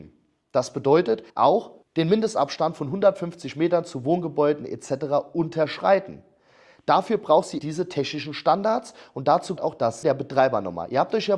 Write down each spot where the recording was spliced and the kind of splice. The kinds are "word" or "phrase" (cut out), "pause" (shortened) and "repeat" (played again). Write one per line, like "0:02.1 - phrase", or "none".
0:01.3 - pause
0:07.6 - word
0:09.6 - word
0:10.0 - word